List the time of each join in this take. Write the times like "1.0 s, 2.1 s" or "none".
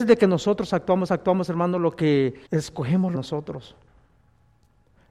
1.1 s, 2.5 s, 3.1 s

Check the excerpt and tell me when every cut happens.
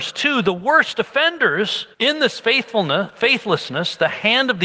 1.9 s

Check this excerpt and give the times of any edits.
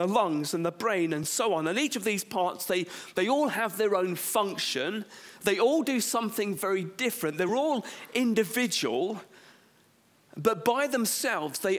none

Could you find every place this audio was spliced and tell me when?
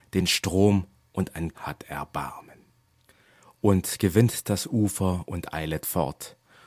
1.5 s

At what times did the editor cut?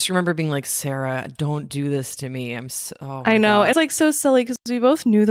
3.7 s

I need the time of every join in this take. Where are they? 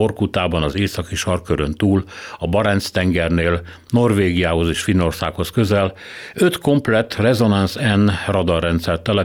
none

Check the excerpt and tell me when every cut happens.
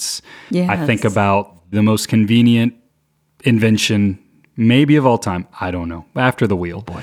1.7 s

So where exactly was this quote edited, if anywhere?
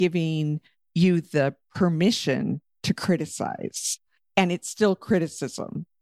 none

